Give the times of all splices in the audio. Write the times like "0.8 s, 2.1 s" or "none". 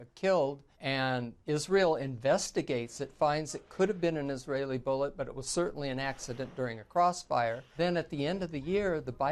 none